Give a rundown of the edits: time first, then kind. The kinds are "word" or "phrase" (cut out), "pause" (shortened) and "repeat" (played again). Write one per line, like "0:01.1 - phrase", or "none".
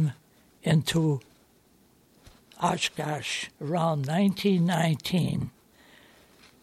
0:03.5 - pause